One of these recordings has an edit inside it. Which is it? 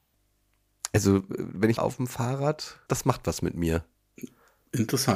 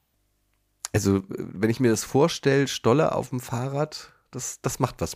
first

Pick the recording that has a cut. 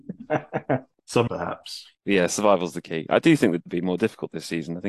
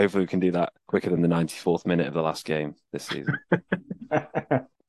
first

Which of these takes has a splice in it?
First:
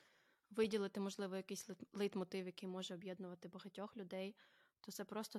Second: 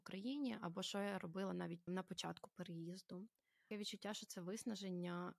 second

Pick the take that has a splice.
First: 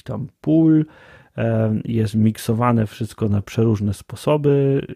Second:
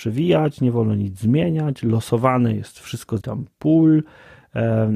second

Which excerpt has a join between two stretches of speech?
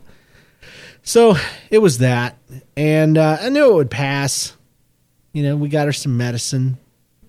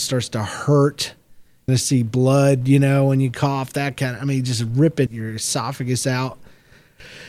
second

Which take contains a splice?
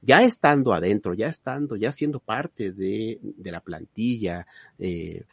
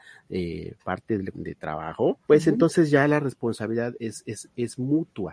second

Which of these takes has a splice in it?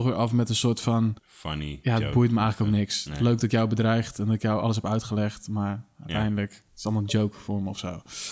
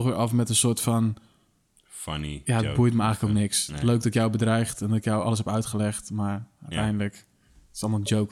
first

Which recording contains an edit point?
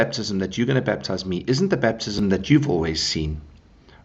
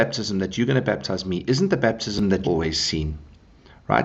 second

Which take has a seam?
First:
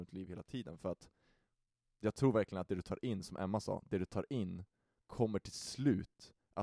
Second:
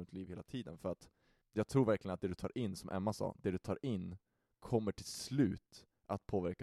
second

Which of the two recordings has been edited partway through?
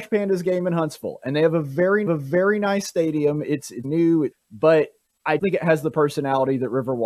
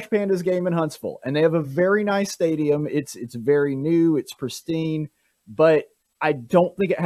first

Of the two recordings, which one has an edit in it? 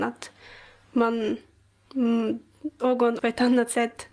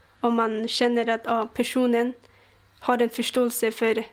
first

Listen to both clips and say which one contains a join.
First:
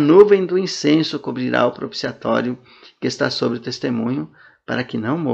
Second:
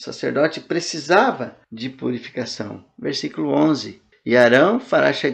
second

